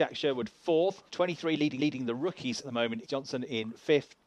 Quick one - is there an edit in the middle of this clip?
yes; 4 cuts; at 1.1 s, 1.8 s, 2.6 s, 3.0 s

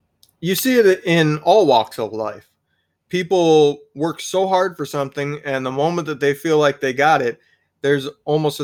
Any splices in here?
no; 0 cuts

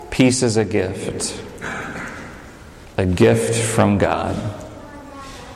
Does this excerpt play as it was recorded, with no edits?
no; 1 cut; at 2.8 s

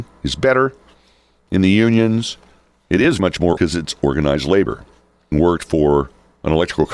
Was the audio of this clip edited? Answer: yes; 3 cuts; at 3.2 s, 3.6 s, 5.3 s

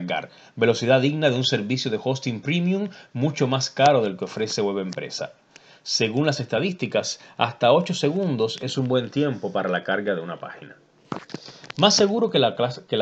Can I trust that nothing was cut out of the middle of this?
yes; 0 cuts

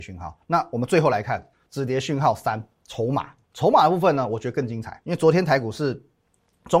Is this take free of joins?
no; 2 cuts; at 1.5 s, 3.4 s

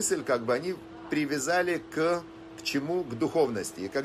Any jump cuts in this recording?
no; 0 cuts

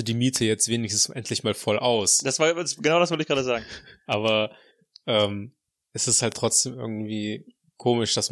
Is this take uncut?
yes; 0 cuts

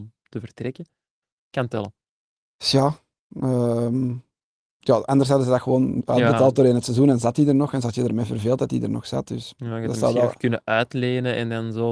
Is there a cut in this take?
no; 0 cuts

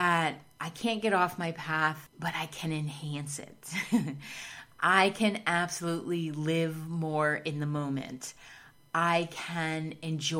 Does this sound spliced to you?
no; 0 cuts

